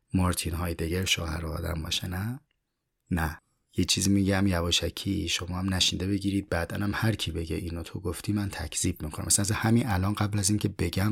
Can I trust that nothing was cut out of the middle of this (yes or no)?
yes